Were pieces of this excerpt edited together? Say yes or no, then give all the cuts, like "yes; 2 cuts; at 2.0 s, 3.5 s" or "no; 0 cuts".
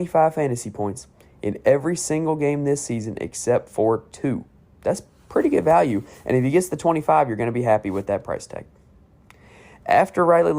no; 0 cuts